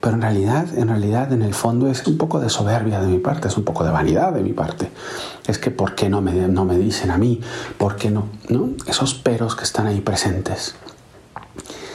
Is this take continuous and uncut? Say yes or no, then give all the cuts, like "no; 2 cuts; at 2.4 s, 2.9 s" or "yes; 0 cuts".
no; 1 cut; at 2.0 s